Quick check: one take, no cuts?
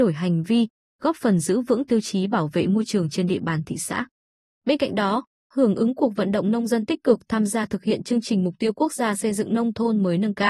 yes; 0 cuts

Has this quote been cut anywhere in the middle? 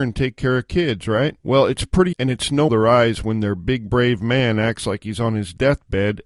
yes; 3 cuts; at 1.4 s, 2.1 s, 2.7 s

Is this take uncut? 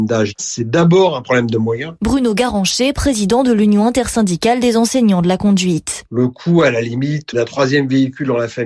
yes; 0 cuts

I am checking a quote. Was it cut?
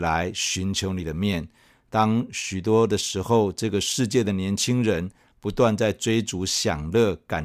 no; 0 cuts

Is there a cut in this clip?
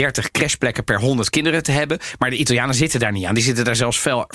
no; 0 cuts

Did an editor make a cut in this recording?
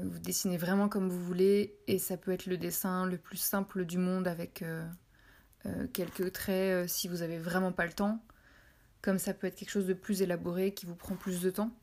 no; 0 cuts

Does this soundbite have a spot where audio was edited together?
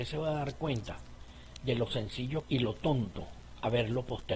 yes; 1 cut; at 2.4 s

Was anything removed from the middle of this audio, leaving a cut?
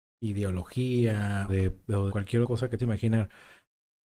yes; 4 cuts; at 1.5 s, 2.1 s, 2.4 s, 2.8 s

